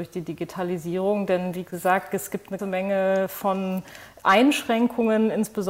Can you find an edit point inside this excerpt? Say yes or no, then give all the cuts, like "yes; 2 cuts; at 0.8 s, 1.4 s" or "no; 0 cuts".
yes; 1 cut; at 2.6 s